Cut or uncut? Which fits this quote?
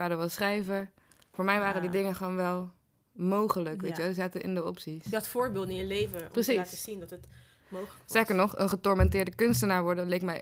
uncut